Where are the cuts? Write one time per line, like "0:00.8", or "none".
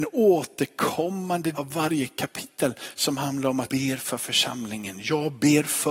0:01.5
0:03.7

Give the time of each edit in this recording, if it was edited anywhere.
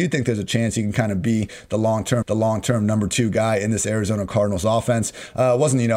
0:02.2

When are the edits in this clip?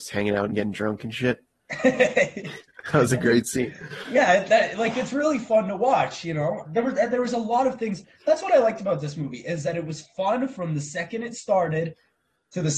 0:06.6

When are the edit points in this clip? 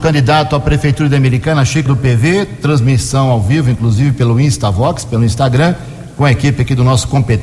0:01.9

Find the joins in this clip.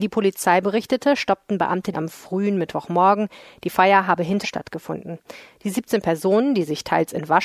0:01.9
0:04.4

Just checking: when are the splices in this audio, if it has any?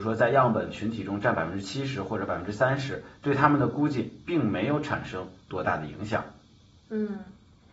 0:05.4

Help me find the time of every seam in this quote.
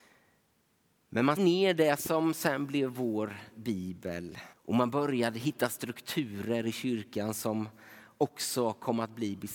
0:01.4
0:04.5

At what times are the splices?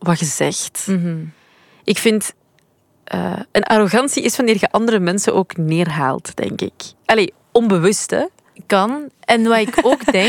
none

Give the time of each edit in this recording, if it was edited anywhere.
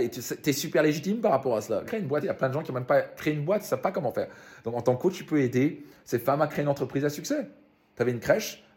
0:01.9
0:02.2

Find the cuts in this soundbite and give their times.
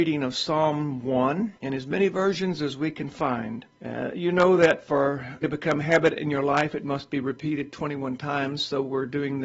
0:01.6
0:03.7
0:05.4

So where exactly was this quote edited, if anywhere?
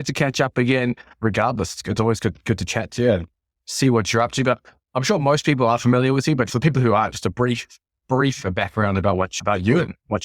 0:06.5

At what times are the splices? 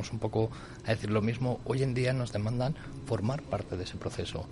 none

